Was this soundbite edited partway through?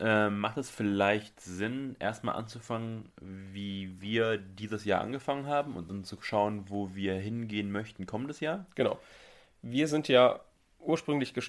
no; 0 cuts

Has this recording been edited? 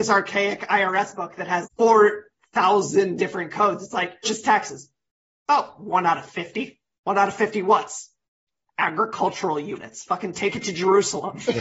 yes; 3 cuts; at 1.6 s, 4.2 s, 5.1 s

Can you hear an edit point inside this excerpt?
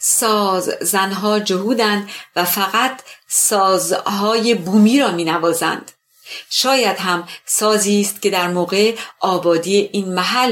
no; 0 cuts

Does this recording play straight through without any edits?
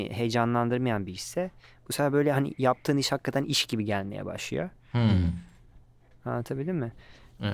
yes; 0 cuts

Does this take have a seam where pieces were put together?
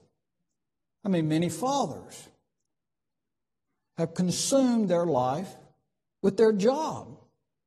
no; 0 cuts

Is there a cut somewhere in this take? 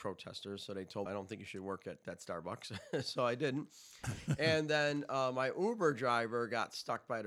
yes; 1 cut; at 1.1 s

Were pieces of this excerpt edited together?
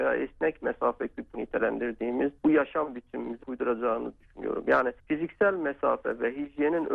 yes; 4 cuts; at 1.3 s, 2.4 s, 3.4 s, 5.0 s

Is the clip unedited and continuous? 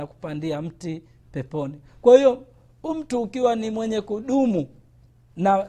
yes; 0 cuts

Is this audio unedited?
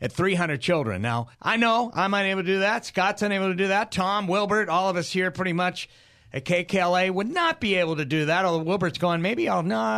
no; 1 cut; at 1.3 s

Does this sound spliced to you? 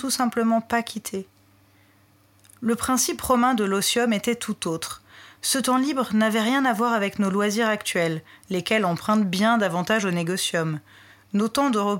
no; 0 cuts

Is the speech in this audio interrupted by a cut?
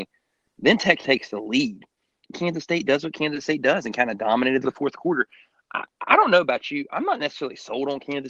yes; 3 cuts; at 1.0 s, 2.3 s, 4.6 s

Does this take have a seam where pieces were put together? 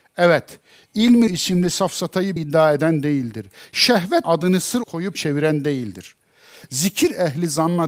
yes; 5 cuts; at 1.3 s, 2.4 s, 4.2 s, 4.8 s, 5.1 s

